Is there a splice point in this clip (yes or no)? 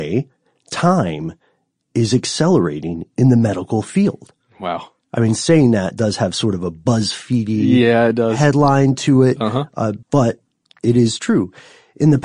yes